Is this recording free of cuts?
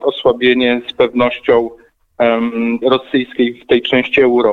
no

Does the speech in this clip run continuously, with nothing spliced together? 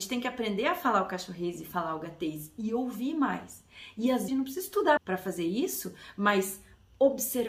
no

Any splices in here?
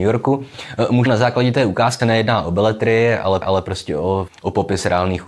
yes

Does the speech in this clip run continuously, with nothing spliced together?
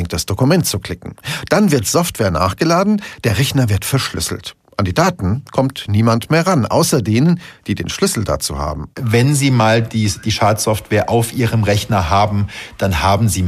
yes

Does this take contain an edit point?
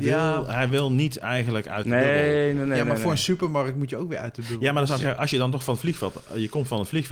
no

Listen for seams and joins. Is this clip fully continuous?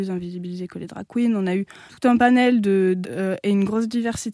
no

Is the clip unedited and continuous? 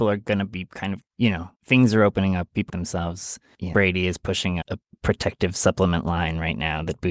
no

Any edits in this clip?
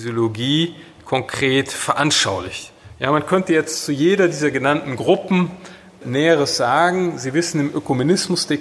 yes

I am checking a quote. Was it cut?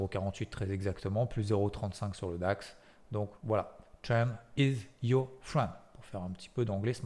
no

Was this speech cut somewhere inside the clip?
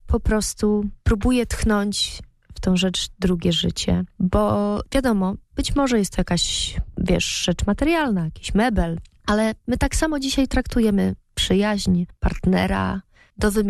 no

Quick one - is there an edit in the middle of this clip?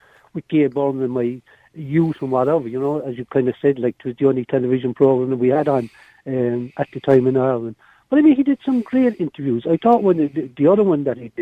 no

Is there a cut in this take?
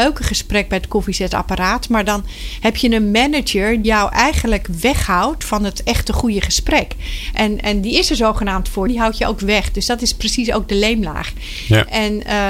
yes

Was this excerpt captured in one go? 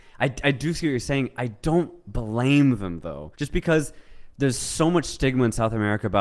no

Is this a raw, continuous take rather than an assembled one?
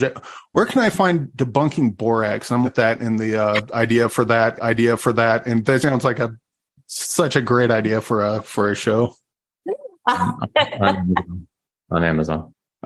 no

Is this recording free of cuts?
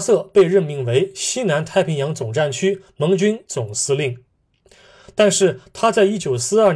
yes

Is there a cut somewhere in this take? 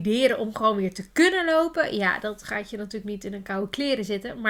no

